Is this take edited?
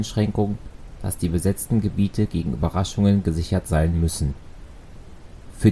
no; 0 cuts

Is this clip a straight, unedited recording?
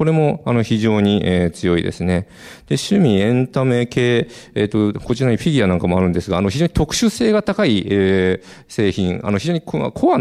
yes; 0 cuts

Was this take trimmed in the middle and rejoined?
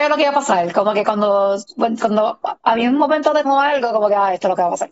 yes; 1 cut; at 3.4 s

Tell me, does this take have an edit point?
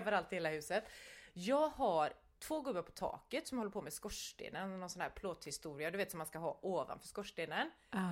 no; 0 cuts

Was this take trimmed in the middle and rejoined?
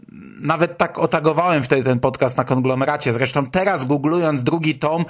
no; 0 cuts

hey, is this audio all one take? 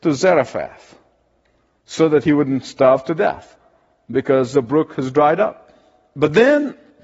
yes; 0 cuts

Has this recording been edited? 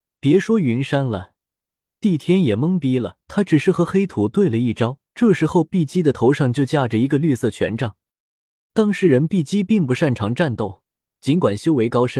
yes; 2 cuts; at 3.2 s, 5.1 s

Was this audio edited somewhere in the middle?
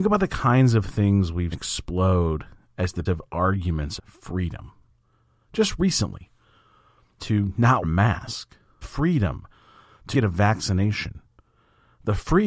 yes; 7 cuts; at 1.5 s, 3.1 s, 4.0 s, 7.2 s, 7.8 s, 8.8 s, 10.1 s

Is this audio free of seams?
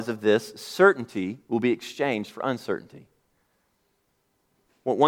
no; 1 cut; at 1.4 s

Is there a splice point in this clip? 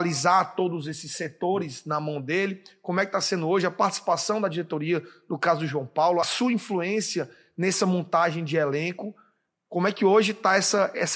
yes; 1 cut; at 6.2 s

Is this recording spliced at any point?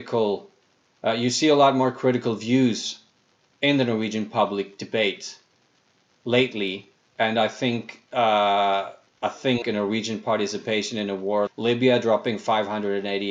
yes; 3 cuts; at 9.1 s, 9.6 s, 11.5 s

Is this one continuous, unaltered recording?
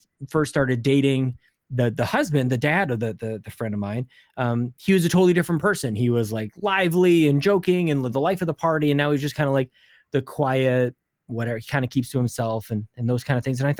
yes; 0 cuts

